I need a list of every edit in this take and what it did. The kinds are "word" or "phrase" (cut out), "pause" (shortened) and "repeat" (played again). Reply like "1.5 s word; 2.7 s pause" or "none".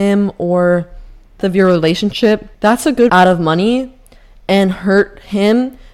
1.4 s word; 2.5 s pause; 3.1 s phrase